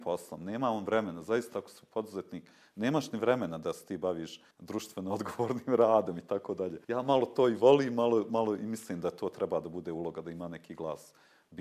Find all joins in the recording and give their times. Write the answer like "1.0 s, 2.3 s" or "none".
4.5 s, 6.8 s